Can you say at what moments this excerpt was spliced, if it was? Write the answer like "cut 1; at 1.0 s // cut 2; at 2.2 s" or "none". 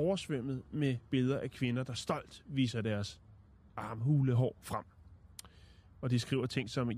none

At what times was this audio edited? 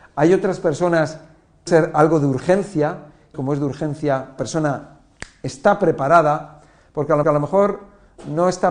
cut 1; at 1.7 s // cut 2; at 3.3 s // cut 3; at 4.4 s // cut 4; at 7.2 s

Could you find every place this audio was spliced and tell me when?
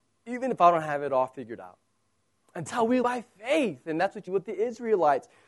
cut 1; at 2.7 s // cut 2; at 3.0 s // cut 3; at 4.3 s

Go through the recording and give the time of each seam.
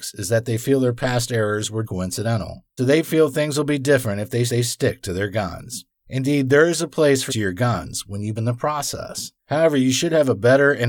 cut 1; at 1.8 s // cut 2; at 2.8 s // cut 3; at 4.5 s // cut 4; at 7.3 s // cut 5; at 8.4 s // cut 6; at 9.4 s

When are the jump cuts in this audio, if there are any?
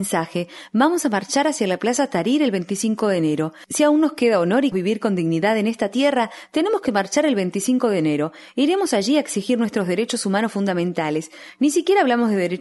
cut 1; at 4.7 s

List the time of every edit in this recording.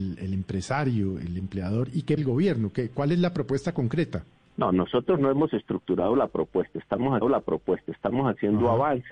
cut 1; at 2.2 s // cut 2; at 4.4 s // cut 3; at 7.2 s

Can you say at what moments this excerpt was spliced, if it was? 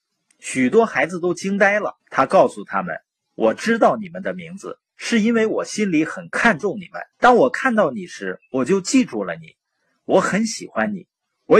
cut 1; at 2.0 s // cut 2; at 7.1 s

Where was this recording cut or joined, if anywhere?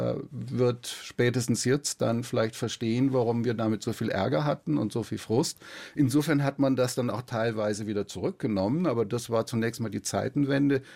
none

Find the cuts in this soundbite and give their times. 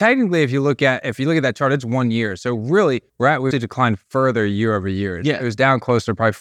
cut 1; at 3.1 s // cut 2; at 3.5 s

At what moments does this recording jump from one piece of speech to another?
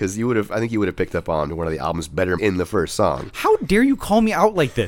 cut 1; at 2.4 s

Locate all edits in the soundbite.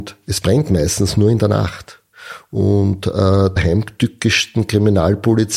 cut 1; at 3.6 s

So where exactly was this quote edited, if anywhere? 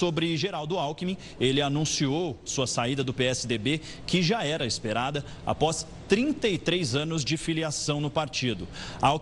none

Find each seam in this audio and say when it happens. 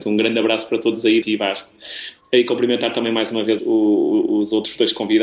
cut 1; at 1.2 s // cut 2; at 3.6 s

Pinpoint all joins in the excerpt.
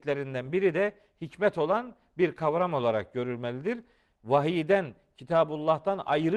none

